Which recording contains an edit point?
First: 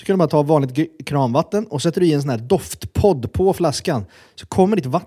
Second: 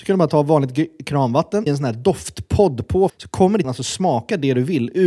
second; 3 cuts; at 1.7 s, 3.1 s, 3.6 s

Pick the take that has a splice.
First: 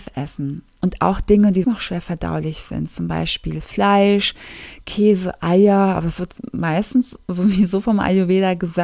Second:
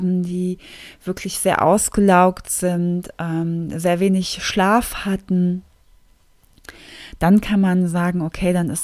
first; 1 cut; at 1.6 s

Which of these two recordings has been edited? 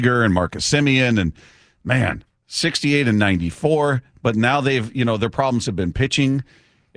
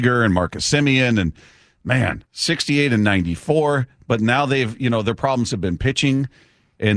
second; 1 cut; at 2.3 s

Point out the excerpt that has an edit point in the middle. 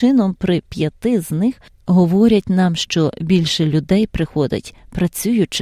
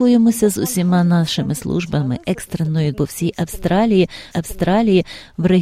second; 2 cuts; at 2.9 s, 4.3 s

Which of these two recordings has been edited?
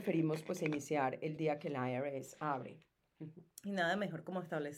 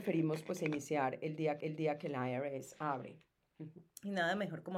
second; 1 cut; at 1.6 s

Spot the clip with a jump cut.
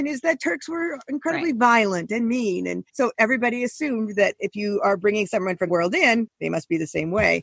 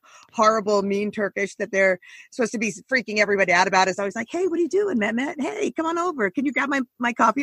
first; 2 cuts; at 2.9 s, 5.7 s

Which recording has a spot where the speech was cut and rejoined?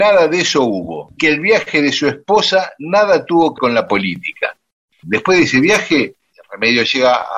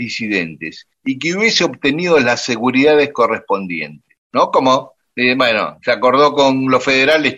first; 2 cuts; at 1.2 s, 3.6 s

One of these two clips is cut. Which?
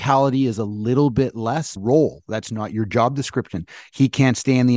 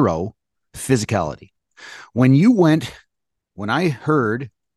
first; 1 cut; at 1.8 s

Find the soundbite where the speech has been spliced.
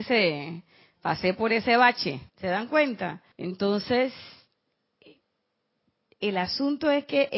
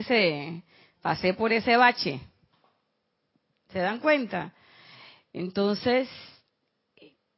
first; 2 cuts; at 2.3 s, 3.3 s

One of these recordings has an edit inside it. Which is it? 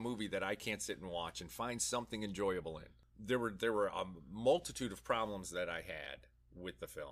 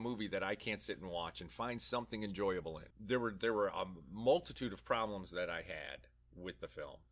second; 1 cut; at 2.9 s

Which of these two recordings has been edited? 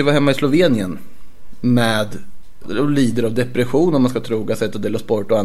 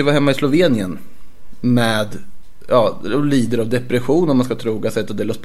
first; 1 cut; at 2.6 s

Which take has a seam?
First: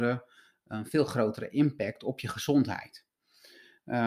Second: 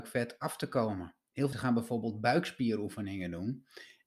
second; 1 cut; at 1.5 s

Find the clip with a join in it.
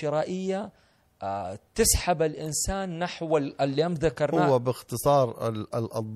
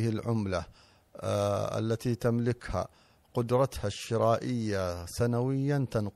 first; 1 cut; at 1.7 s

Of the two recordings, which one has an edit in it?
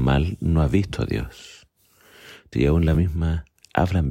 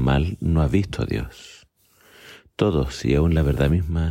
first; 2 cuts; at 2.5 s, 2.9 s

